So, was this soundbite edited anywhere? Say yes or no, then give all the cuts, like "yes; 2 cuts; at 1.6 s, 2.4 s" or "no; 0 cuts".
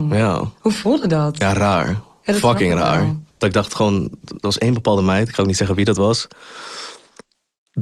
yes; 1 cut; at 3.3 s